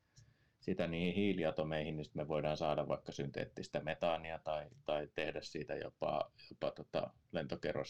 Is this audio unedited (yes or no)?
yes